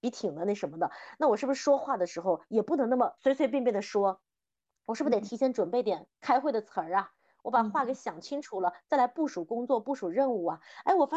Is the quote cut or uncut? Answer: cut